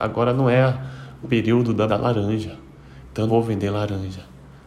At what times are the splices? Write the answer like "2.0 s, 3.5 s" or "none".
1.2 s, 1.9 s, 3.3 s